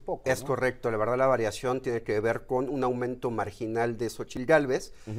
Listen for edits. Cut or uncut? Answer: uncut